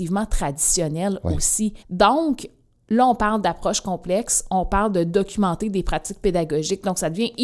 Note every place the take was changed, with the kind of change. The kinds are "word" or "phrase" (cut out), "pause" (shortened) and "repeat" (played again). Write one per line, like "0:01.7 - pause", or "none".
0:01.8 - pause